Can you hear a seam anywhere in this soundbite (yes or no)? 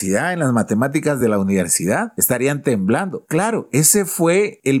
no